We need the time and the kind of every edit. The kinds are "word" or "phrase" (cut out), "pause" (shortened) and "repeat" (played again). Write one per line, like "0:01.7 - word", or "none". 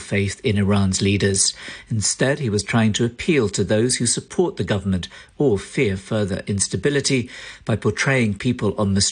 none